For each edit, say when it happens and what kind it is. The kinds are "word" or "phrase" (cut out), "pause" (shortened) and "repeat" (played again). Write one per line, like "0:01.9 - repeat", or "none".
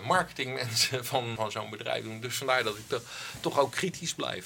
0:01.4 - word